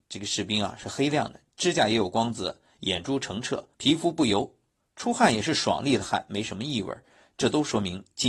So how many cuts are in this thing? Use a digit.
1